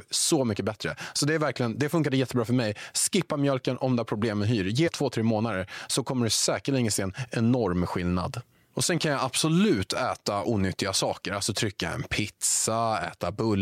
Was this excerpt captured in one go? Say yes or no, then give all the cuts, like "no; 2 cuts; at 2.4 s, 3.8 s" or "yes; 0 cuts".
no; 1 cut; at 4.9 s